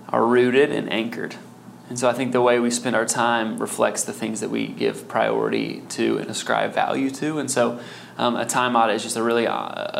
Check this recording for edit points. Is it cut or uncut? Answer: uncut